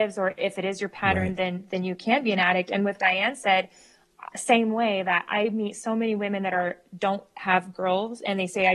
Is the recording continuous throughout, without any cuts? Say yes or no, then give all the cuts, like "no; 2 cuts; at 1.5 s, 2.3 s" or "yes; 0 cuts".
no; 1 cut; at 3.0 s